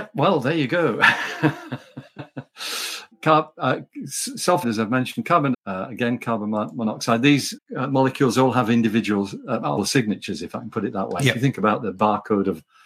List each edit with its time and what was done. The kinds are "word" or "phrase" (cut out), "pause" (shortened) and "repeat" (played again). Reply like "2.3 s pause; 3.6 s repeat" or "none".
3.1 s word; 4.6 s word; 5.5 s word; 7.6 s word; 9.8 s word